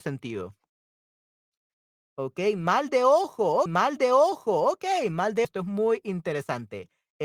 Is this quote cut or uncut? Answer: cut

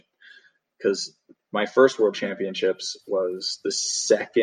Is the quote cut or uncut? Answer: uncut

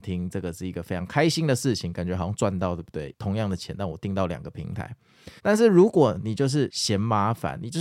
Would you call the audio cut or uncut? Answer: cut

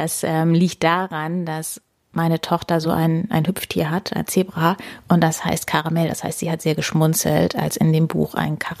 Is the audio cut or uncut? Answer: uncut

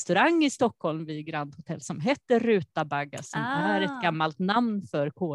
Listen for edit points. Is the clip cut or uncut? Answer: uncut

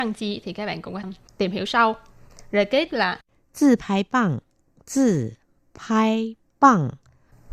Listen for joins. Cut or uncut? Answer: cut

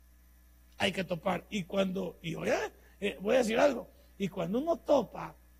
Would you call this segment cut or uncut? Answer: uncut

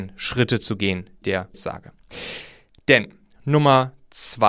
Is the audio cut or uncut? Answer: cut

